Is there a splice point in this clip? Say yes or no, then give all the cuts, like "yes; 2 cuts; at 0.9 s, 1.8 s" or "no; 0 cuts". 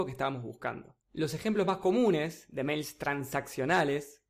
yes; 1 cut; at 1.0 s